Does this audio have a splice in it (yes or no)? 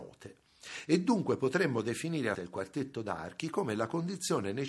yes